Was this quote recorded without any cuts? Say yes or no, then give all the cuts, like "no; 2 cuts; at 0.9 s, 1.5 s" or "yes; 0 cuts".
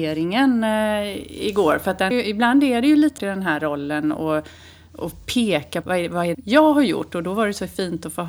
no; 4 cuts; at 2.1 s, 3.2 s, 5.8 s, 6.3 s